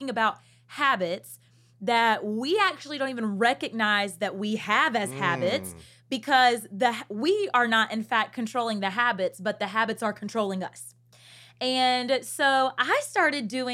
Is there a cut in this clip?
no; 0 cuts

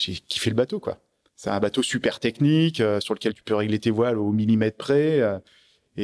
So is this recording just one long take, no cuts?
yes; 0 cuts

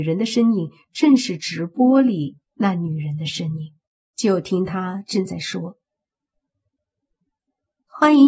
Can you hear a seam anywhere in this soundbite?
yes; 1 cut; at 3.9 s

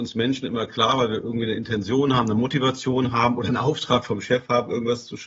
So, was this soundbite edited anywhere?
no; 0 cuts

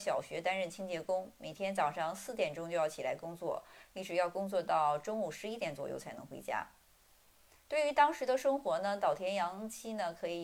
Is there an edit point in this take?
no; 0 cuts

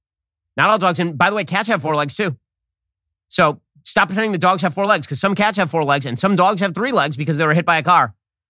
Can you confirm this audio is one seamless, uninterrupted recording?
yes; 0 cuts

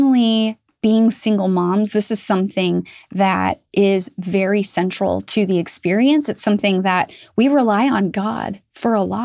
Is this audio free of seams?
yes; 0 cuts

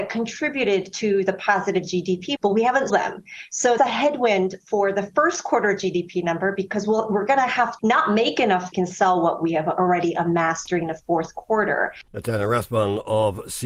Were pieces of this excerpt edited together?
yes; 6 cuts; at 2.4 s, 2.9 s, 3.8 s, 7.8 s, 8.7 s, 12.1 s

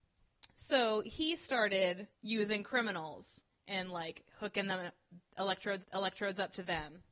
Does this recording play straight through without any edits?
no; 2 cuts; at 2.1 s, 5.8 s

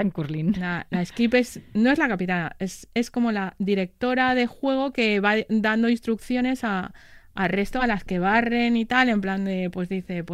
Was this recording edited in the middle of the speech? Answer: no; 0 cuts

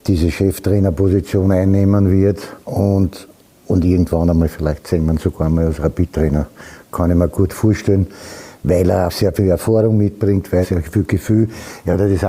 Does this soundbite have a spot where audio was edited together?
yes; 3 cuts; at 2.6 s, 9.1 s, 10.6 s

